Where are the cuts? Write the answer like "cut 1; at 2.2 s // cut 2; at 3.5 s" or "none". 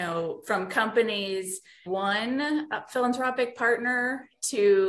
cut 1; at 1.9 s